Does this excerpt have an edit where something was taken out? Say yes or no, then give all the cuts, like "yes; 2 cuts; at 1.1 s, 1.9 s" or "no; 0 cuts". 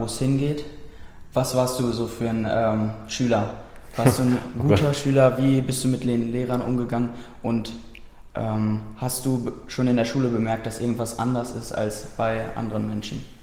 no; 0 cuts